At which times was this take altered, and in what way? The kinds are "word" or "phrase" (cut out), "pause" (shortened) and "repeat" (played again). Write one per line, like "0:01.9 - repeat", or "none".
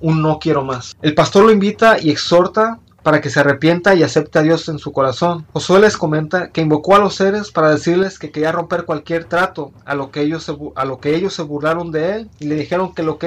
0:05.5 - pause
0:12.4 - pause

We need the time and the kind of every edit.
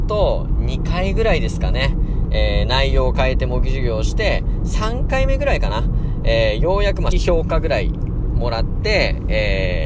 0:07.1 - word

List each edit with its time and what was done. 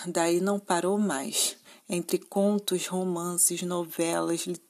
none

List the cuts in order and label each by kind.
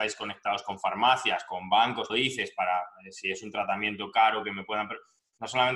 0:02.1 - word

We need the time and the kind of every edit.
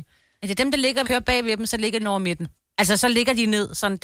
0:01.0 - phrase
0:02.0 - word
0:02.6 - pause

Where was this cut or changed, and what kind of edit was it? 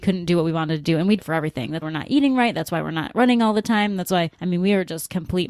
0:01.2 - word
0:01.8 - word
0:04.3 - pause

